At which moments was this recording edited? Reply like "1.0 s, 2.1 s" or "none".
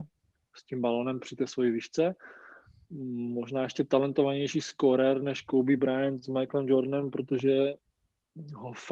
none